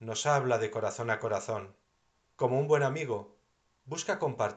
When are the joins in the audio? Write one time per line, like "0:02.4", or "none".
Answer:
0:02.2